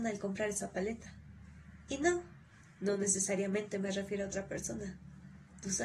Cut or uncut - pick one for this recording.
uncut